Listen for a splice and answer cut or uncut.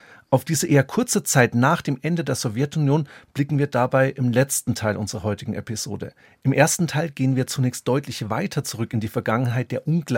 uncut